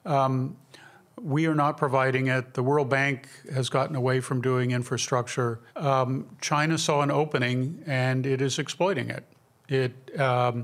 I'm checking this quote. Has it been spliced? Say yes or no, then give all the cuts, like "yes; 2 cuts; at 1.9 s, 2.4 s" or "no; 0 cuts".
yes; 1 cut; at 5.7 s